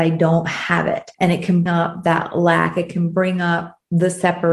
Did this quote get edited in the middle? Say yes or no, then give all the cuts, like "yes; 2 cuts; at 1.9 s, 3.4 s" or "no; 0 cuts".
yes; 2 cuts; at 1.1 s, 1.7 s